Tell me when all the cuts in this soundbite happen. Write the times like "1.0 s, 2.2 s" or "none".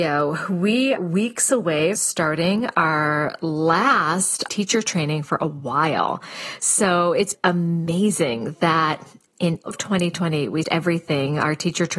1.0 s, 2.0 s, 4.5 s, 7.3 s, 9.7 s, 10.6 s